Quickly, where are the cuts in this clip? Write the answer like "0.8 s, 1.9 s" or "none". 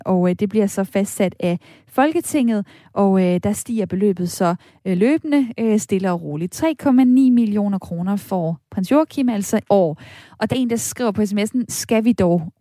9.7 s, 10.5 s, 11.7 s